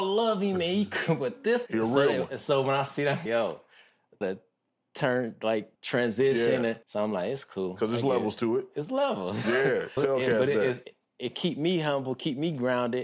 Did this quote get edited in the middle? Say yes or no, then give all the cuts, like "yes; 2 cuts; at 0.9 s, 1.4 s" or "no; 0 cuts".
yes; 7 cuts; at 1.7 s, 3.3 s, 4.2 s, 5.7 s, 6.8 s, 10.0 s, 10.8 s